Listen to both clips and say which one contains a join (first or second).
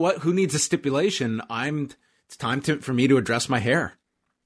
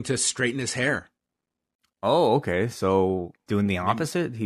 second